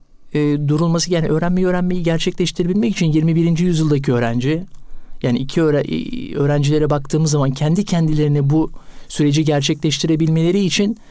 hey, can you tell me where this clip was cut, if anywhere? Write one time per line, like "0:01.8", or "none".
none